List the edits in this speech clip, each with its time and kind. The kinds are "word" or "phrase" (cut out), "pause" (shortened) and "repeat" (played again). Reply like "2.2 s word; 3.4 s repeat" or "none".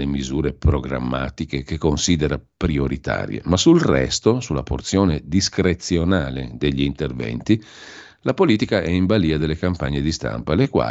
none